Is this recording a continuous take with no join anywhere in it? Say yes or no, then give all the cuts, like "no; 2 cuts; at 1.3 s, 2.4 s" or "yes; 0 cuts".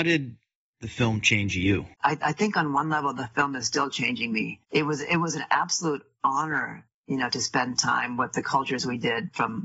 no; 2 cuts; at 1.9 s, 4.6 s